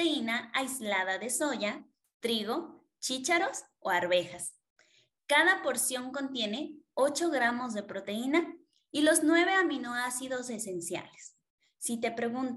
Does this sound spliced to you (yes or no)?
no